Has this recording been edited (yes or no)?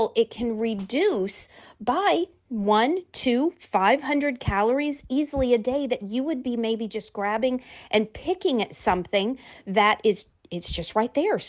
no